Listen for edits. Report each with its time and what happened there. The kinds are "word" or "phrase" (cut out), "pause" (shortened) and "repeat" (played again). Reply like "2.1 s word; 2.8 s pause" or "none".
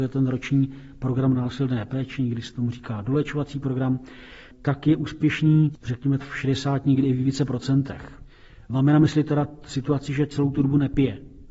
6.2 s word